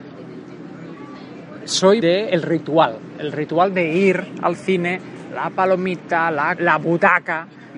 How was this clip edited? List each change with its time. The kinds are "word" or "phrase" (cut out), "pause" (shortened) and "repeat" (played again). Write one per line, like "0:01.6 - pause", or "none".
0:02.0 - word
0:06.6 - word